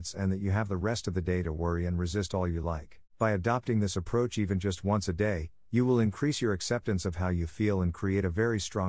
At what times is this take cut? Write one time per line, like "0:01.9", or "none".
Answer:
0:03.1